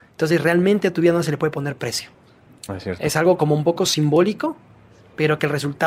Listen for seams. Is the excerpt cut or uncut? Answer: uncut